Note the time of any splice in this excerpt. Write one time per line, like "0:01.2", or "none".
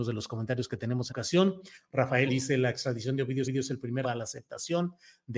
0:01.1
0:02.3
0:03.4
0:04.0